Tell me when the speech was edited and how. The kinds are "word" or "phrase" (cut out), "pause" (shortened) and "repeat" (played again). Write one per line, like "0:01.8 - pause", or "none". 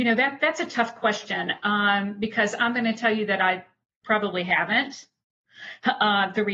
none